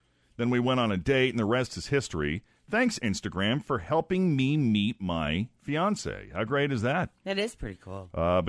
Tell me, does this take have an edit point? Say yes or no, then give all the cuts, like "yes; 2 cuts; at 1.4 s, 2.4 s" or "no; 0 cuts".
no; 0 cuts